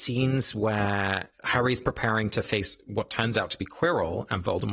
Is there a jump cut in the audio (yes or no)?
yes